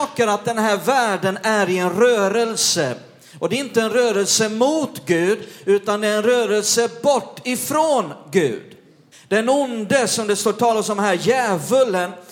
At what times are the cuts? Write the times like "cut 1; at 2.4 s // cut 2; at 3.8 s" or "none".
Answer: cut 1; at 9.1 s